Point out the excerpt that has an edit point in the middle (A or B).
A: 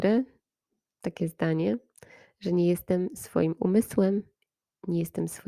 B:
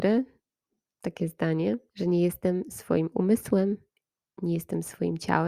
B